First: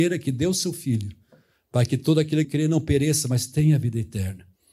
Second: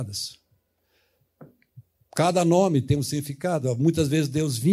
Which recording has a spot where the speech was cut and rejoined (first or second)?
first